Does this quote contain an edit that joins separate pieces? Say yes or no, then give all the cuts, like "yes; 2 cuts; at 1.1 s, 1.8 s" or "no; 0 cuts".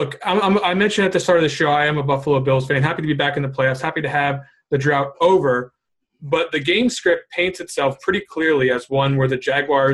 no; 0 cuts